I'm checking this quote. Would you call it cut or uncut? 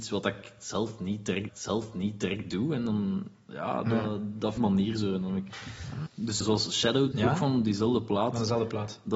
cut